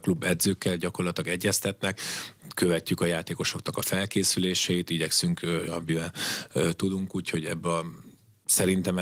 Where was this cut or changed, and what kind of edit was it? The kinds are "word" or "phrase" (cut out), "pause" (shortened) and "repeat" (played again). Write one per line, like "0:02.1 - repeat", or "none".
0:05.7 - word